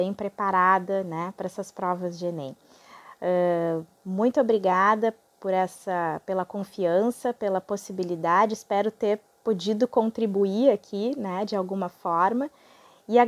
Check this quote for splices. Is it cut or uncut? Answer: uncut